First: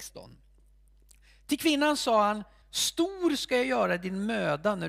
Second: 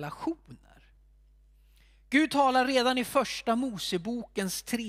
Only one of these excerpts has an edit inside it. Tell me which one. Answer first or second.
first